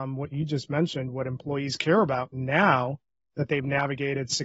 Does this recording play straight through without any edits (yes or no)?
yes